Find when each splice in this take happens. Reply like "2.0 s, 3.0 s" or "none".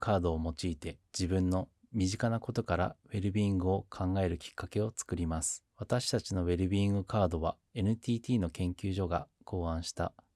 1.1 s, 5.7 s, 7.7 s